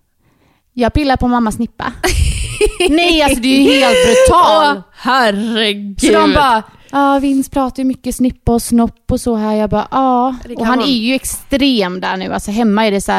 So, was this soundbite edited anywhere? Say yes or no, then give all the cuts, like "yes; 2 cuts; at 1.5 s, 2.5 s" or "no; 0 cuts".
no; 0 cuts